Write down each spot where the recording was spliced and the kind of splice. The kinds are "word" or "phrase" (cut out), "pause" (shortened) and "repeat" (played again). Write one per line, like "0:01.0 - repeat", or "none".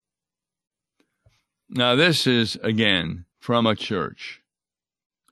0:03.3 - pause
0:03.8 - word